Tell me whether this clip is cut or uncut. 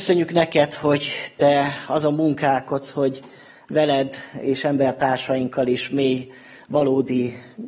uncut